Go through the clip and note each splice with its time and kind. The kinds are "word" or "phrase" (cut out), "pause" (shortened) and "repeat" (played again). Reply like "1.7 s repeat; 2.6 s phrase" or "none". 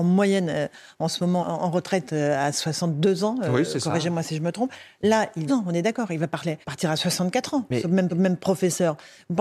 1.4 s word; 5.5 s phrase; 6.6 s pause; 8.1 s repeat